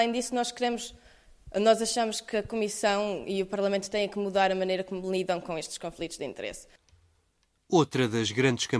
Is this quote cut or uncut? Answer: uncut